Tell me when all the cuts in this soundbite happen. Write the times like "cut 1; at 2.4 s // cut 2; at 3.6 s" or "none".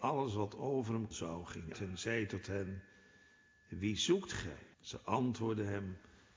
cut 1; at 1.1 s // cut 2; at 1.7 s // cut 3; at 4.7 s